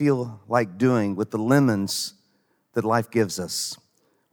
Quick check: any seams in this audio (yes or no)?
no